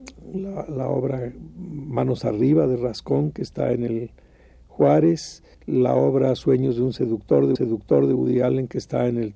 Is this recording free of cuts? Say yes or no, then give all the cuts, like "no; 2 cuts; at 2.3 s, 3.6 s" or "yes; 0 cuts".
no; 2 cuts; at 5.5 s, 7.6 s